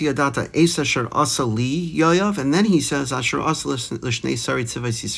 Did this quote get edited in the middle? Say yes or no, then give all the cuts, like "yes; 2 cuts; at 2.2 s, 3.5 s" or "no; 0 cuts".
no; 0 cuts